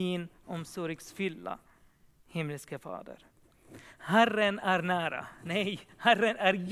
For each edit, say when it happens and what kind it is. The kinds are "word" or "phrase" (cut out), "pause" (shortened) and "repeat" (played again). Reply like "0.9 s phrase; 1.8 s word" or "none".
none